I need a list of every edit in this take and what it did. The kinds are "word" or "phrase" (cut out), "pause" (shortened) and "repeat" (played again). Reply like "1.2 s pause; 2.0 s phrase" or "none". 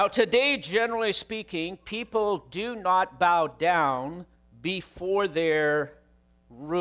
4.4 s pause